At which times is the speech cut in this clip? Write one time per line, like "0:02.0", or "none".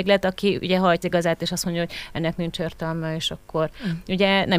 0:01.0